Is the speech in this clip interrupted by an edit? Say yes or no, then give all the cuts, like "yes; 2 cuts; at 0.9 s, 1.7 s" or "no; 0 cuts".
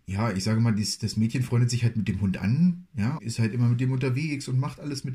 yes; 1 cut; at 3.2 s